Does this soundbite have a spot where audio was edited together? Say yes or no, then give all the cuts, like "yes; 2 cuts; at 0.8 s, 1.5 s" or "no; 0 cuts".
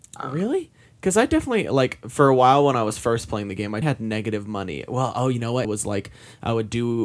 yes; 2 cuts; at 3.8 s, 5.6 s